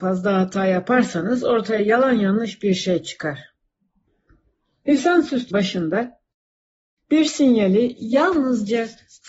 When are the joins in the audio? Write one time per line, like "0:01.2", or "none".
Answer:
0:05.5

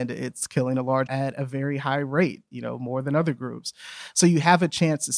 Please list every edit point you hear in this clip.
0:01.1

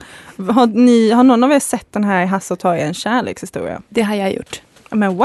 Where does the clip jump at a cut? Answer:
0:03.9

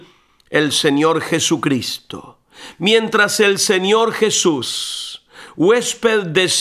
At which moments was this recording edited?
none

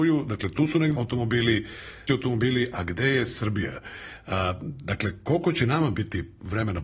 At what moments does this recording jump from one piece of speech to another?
0:00.9
0:02.1

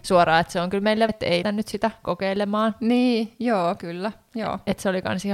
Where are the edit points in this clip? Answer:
0:01.1
0:01.4
0:03.8

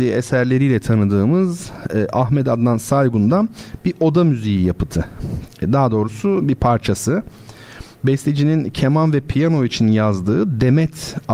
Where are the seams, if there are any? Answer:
none

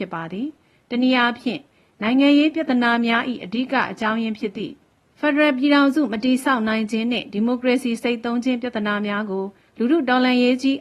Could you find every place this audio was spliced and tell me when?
none

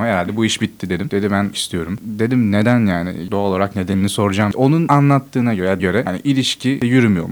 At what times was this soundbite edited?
0:01.5
0:05.8

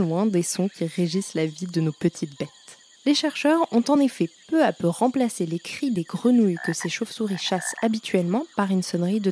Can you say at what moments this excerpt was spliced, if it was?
none

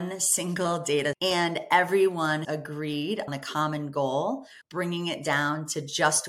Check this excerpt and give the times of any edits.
0:01.1
0:02.4
0:03.3
0:04.6

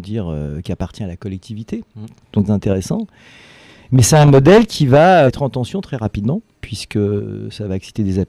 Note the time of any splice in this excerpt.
0:02.5
0:05.3
0:06.5

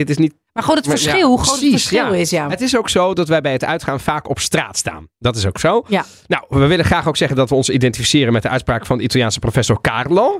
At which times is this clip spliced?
none

